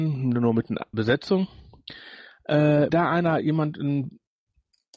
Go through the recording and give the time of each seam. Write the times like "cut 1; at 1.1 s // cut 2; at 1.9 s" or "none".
cut 1; at 0.9 s // cut 2; at 2.9 s